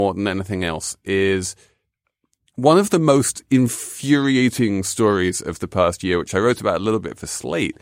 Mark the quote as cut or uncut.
uncut